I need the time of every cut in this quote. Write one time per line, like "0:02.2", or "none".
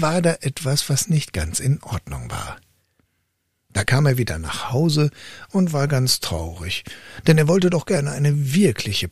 none